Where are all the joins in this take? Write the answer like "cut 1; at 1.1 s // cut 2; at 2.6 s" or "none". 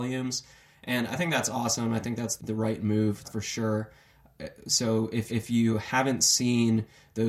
cut 1; at 2.4 s // cut 2; at 3.2 s // cut 3; at 5.3 s